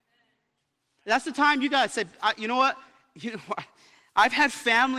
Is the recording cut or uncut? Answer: uncut